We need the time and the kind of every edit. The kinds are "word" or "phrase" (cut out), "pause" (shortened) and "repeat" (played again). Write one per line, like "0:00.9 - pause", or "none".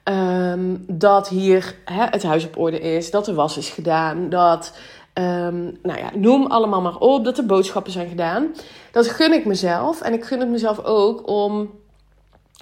none